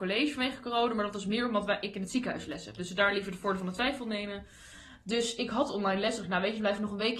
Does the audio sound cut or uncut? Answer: uncut